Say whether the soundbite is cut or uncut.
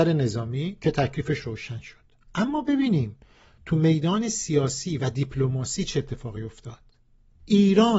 uncut